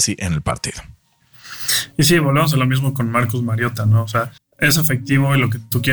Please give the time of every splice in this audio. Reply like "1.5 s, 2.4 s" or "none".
4.4 s

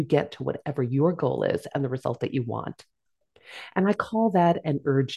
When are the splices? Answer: none

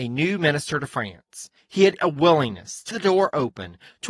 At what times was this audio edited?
2.0 s, 2.9 s

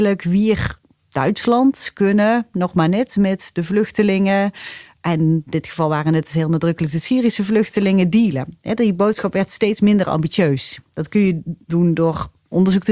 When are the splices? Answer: none

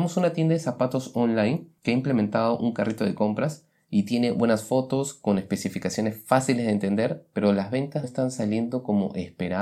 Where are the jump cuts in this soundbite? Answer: 8.0 s

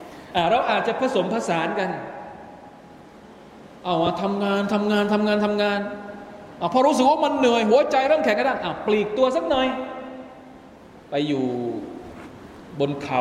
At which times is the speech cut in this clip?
none

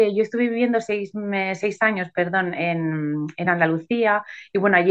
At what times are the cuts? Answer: none

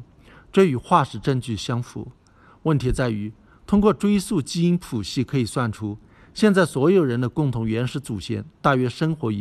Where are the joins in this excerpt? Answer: none

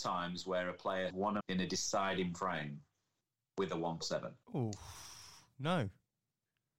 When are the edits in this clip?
1.1 s, 1.4 s, 4.0 s, 4.4 s

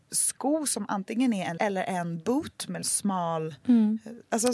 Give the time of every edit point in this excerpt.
1.6 s, 2.8 s

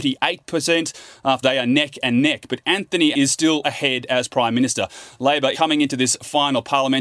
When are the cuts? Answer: 1.4 s, 3.1 s, 3.6 s, 4.3 s, 5.5 s

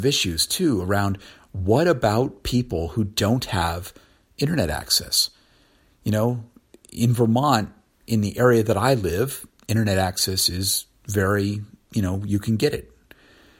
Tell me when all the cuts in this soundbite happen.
none

